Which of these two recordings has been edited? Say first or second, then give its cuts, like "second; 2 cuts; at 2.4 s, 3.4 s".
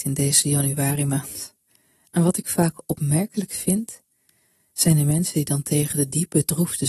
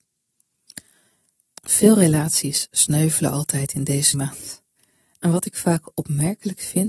second; 1 cut; at 4.1 s